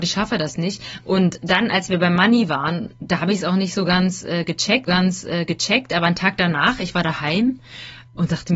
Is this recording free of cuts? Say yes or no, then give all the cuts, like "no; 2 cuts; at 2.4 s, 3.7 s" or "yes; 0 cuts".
no; 1 cut; at 4.9 s